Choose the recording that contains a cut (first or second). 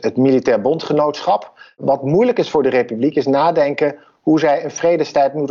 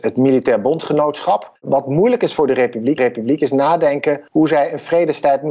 second